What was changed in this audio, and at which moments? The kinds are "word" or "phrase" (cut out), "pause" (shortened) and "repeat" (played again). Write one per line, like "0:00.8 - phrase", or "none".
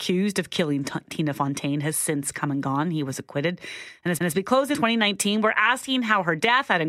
0:04.2 - repeat
0:04.7 - word